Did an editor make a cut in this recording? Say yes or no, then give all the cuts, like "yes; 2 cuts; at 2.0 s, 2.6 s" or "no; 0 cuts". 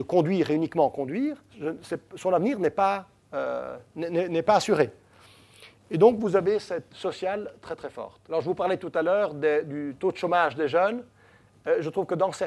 yes; 3 cuts; at 1.5 s, 6.9 s, 8.2 s